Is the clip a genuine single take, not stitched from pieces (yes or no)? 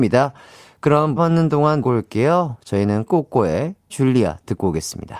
no